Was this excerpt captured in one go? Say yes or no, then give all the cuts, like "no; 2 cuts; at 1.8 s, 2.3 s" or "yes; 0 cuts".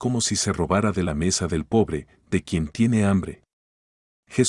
yes; 0 cuts